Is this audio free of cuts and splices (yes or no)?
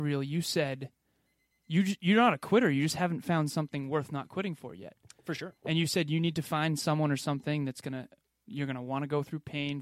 yes